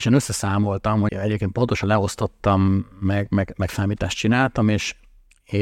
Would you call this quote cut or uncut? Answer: cut